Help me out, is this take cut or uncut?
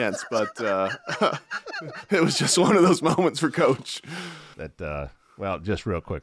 uncut